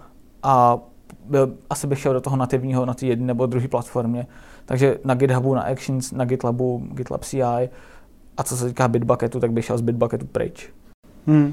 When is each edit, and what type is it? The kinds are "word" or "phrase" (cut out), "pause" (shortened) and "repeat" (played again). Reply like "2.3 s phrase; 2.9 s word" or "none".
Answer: none